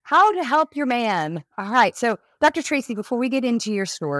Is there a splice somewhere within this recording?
no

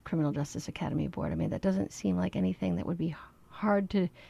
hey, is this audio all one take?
yes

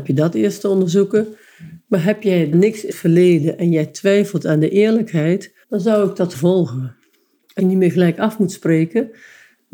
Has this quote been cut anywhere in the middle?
yes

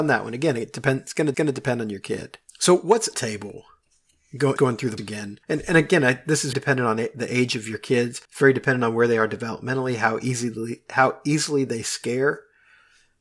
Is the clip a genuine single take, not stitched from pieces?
no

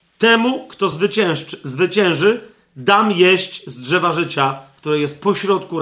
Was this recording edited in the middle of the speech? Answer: no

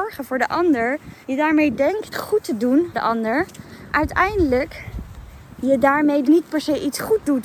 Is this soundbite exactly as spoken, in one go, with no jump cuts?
no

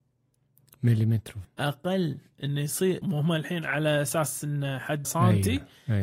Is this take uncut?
no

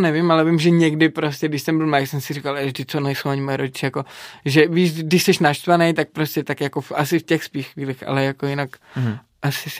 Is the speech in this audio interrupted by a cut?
no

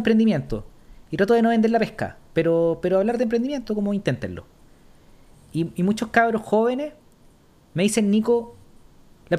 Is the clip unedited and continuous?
yes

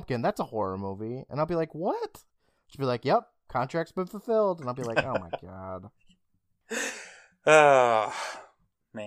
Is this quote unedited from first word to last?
yes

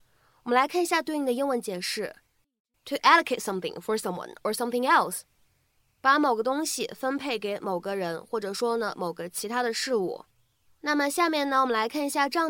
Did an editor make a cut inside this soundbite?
no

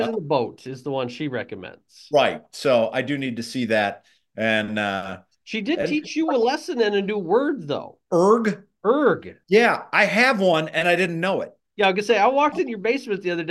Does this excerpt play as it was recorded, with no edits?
yes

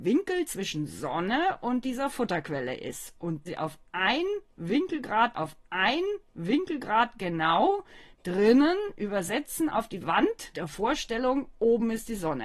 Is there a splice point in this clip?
yes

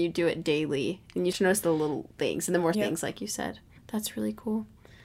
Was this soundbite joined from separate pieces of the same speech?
yes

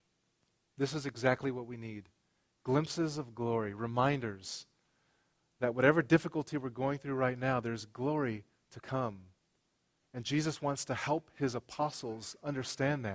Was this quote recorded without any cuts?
yes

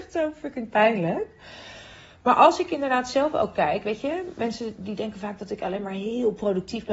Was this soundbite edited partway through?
no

